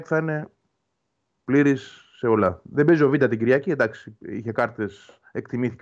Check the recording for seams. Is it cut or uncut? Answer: uncut